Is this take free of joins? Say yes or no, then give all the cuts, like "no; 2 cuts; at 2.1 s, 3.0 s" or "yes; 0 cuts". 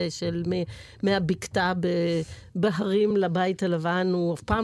yes; 0 cuts